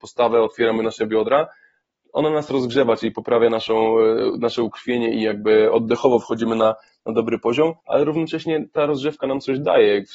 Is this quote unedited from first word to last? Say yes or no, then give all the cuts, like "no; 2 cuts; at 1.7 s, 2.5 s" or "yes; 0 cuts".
no; 1 cut; at 7.8 s